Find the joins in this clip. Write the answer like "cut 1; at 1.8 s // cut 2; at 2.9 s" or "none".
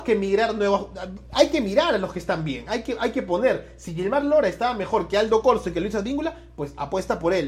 none